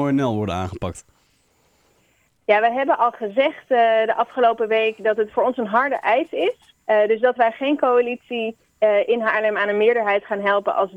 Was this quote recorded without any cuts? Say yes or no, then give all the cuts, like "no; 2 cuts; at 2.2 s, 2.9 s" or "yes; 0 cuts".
no; 1 cut; at 6.8 s